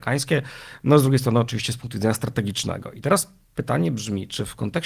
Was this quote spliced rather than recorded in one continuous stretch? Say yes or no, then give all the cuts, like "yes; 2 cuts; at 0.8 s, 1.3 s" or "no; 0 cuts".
no; 0 cuts